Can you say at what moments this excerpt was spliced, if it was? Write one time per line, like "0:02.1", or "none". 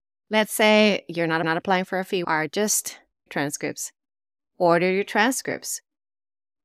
0:01.4
0:02.2
0:03.3